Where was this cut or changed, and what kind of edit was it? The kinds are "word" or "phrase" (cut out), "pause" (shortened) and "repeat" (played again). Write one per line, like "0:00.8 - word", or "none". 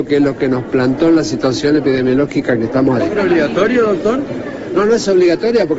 0:03.0 - word